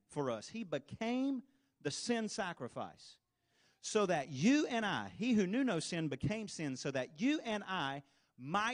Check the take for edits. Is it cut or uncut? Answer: uncut